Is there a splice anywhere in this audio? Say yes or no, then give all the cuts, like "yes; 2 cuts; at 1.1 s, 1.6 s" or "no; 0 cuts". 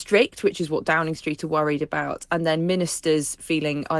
no; 0 cuts